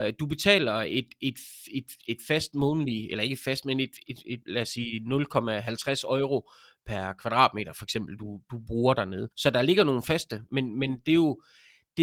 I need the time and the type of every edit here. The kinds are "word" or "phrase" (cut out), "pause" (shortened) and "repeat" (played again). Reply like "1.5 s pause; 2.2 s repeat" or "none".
4.4 s pause; 9.3 s pause